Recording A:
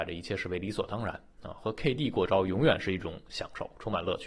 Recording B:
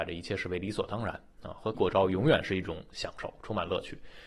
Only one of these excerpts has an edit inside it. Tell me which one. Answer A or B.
B